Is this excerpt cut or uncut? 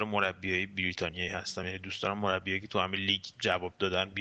uncut